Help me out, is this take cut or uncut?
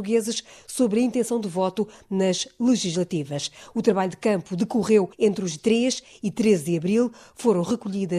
cut